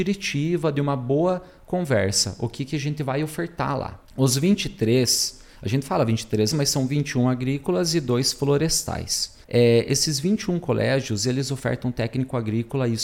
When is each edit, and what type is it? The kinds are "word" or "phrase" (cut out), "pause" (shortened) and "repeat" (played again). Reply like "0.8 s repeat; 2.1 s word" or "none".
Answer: 4.0 s pause; 6.5 s word; 9.4 s pause